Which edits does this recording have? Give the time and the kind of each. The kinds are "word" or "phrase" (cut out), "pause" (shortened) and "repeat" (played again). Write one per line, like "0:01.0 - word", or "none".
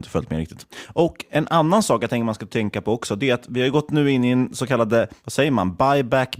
none